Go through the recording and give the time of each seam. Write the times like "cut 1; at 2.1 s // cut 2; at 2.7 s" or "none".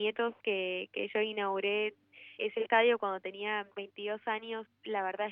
cut 1; at 2.4 s // cut 2; at 3.7 s